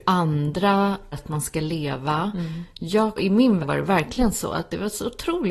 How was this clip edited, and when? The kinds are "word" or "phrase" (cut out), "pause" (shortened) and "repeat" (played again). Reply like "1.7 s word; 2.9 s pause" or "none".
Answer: 1.1 s word; 3.2 s word; 3.6 s word

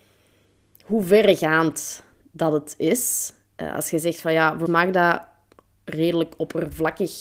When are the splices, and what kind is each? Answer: 4.7 s word

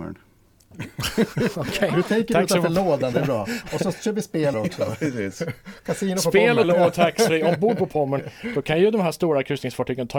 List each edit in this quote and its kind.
3.1 s phrase; 4.5 s word; 6.6 s word

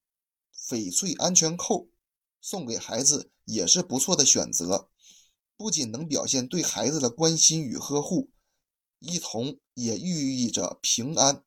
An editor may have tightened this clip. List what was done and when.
none

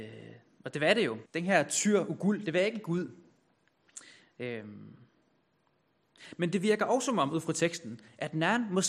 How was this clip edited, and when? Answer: 1.3 s pause

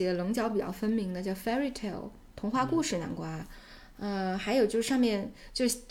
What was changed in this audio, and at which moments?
none

